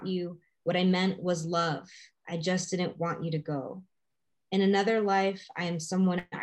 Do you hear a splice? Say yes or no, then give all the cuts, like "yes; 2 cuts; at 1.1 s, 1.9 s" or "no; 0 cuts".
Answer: no; 0 cuts